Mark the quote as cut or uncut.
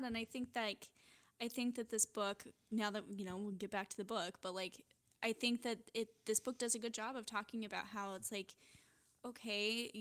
uncut